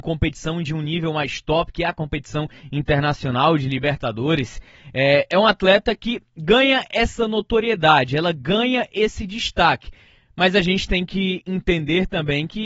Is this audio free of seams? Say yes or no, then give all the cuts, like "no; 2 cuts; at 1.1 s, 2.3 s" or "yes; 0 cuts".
yes; 0 cuts